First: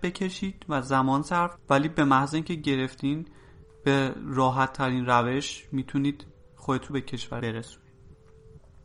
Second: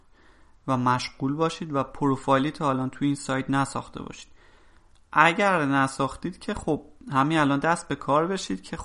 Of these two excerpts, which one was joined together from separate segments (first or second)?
first